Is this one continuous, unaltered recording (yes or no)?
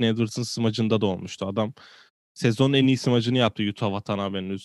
yes